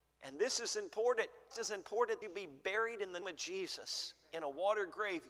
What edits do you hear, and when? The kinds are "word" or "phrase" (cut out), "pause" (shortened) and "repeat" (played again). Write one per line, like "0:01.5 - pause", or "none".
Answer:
0:01.5 - word
0:02.2 - word
0:03.2 - word

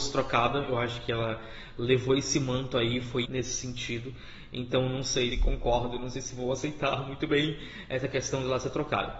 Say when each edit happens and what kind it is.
0:03.2 - word
0:05.3 - word

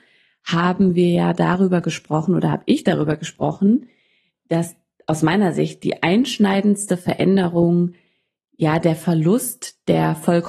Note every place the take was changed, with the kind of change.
none

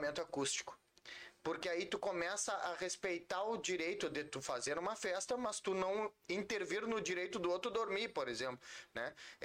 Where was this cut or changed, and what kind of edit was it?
none

